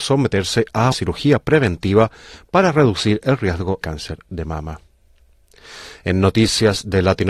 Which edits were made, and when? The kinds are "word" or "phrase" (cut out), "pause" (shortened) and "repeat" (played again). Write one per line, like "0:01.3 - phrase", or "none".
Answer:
0:00.9 - word
0:03.8 - word